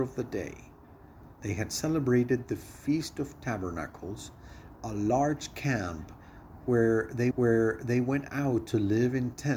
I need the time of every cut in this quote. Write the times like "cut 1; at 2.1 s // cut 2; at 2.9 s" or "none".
cut 1; at 7.3 s

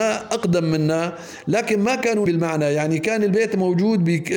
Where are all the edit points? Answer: cut 1; at 2.3 s

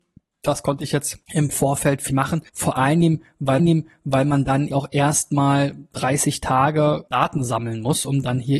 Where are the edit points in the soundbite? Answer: cut 1; at 1.2 s // cut 2; at 2.1 s // cut 3; at 2.5 s // cut 4; at 3.6 s // cut 5; at 4.7 s // cut 6; at 7.1 s

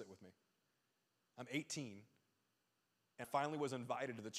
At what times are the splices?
cut 1; at 3.2 s

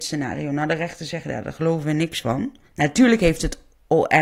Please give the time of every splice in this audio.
cut 1; at 2.6 s

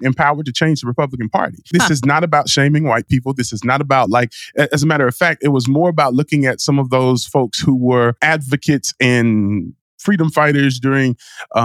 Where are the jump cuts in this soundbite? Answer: none

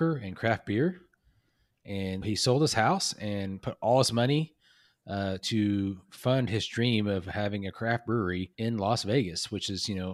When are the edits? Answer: cut 1; at 2.2 s // cut 2; at 8.5 s

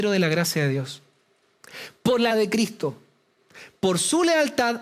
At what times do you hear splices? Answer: cut 1; at 2.3 s

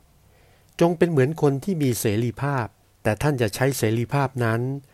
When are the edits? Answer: cut 1; at 2.8 s

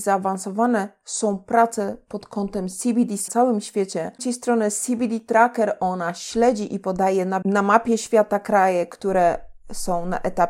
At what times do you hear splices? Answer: cut 1; at 3.3 s // cut 2; at 4.2 s // cut 3; at 7.4 s

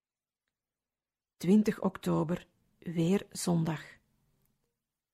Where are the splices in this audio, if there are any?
none

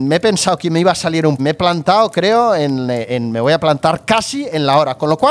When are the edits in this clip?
cut 1; at 1.4 s

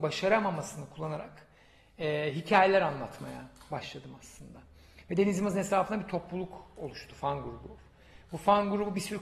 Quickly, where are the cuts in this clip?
none

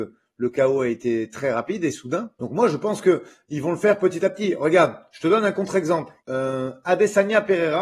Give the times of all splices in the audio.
cut 1; at 2.4 s // cut 2; at 6.2 s

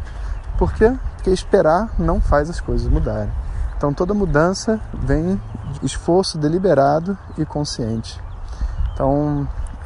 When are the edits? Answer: cut 1; at 5.8 s

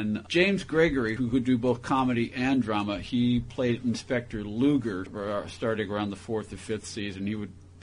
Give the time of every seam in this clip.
cut 1; at 1.2 s // cut 2; at 5.1 s

